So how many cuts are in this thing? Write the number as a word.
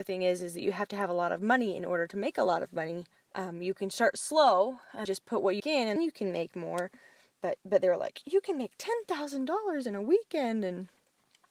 five